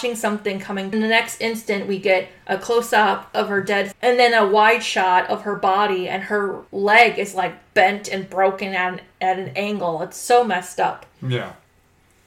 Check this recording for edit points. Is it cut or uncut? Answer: cut